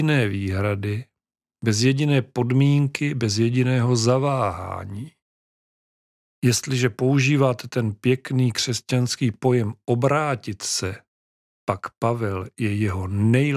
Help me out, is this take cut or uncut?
uncut